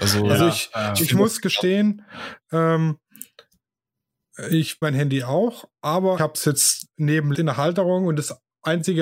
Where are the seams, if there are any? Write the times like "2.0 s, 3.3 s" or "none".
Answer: 4.8 s, 6.2 s, 7.3 s